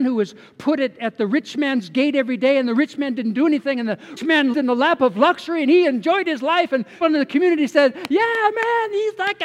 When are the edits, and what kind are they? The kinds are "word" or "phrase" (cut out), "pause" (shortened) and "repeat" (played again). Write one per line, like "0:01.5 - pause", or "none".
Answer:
0:04.2 - word
0:04.5 - word
0:07.0 - word